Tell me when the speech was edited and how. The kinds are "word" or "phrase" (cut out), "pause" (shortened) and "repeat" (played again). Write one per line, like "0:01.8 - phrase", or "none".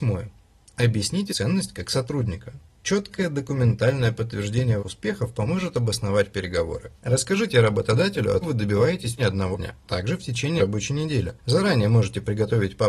0:01.3 - word
0:02.7 - pause
0:04.8 - word
0:08.4 - phrase
0:09.2 - word
0:09.5 - word
0:09.9 - word
0:10.6 - word
0:11.4 - pause